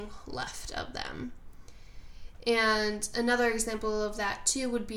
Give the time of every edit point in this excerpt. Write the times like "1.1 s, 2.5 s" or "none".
none